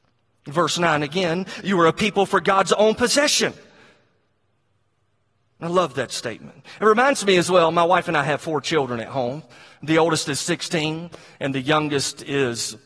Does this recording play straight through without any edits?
yes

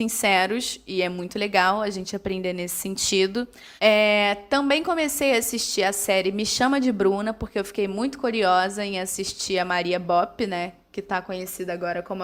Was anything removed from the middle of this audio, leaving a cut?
yes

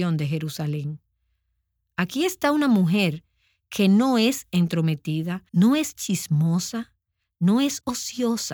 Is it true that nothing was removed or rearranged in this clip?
no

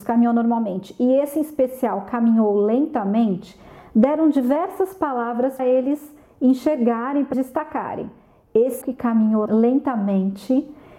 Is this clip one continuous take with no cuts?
no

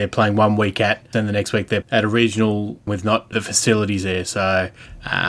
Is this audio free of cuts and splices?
no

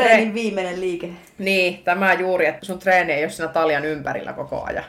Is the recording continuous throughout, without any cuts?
no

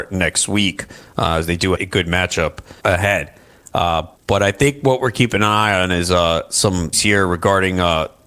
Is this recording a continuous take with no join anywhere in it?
no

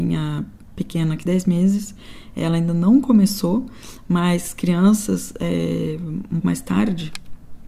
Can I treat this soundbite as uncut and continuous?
no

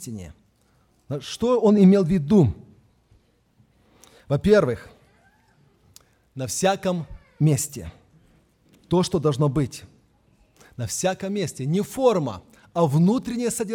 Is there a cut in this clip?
no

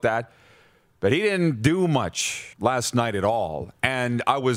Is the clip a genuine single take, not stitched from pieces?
no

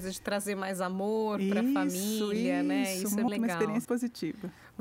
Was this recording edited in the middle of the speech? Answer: yes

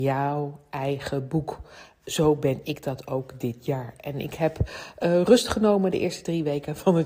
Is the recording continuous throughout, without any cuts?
yes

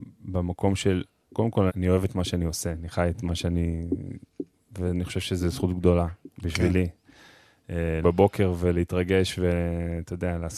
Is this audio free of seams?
no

